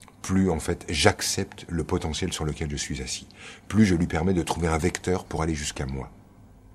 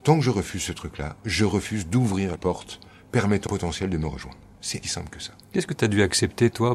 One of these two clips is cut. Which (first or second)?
second